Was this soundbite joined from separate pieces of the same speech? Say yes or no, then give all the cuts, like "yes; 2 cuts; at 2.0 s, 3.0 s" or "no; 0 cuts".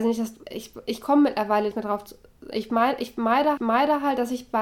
yes; 2 cuts; at 1.7 s, 3.6 s